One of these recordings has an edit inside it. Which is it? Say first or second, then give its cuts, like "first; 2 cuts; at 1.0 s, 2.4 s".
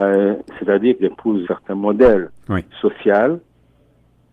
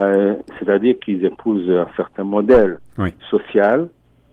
first; 2 cuts; at 1.0 s, 1.4 s